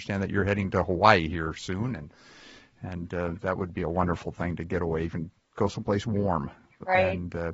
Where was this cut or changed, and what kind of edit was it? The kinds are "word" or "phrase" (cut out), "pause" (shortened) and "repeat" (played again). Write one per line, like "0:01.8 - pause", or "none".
none